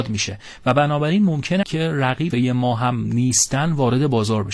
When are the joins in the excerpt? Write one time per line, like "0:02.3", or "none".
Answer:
0:01.6
0:02.3